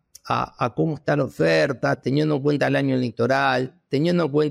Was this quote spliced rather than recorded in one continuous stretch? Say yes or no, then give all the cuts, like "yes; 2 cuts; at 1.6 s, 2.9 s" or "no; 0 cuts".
no; 0 cuts